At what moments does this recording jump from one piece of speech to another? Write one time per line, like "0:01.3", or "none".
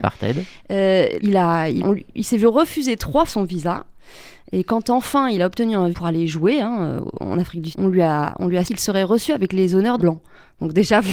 0:01.2
0:01.8
0:03.3
0:05.9
0:07.7
0:08.6
0:10.0